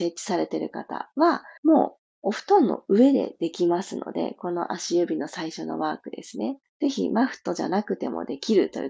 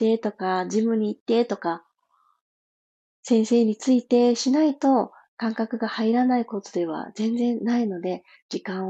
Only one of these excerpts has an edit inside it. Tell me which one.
first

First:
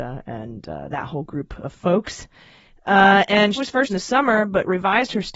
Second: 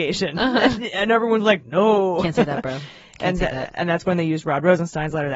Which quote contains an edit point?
first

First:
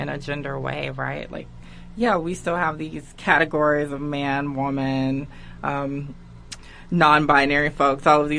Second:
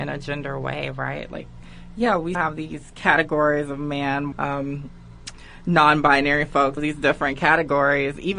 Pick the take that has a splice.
second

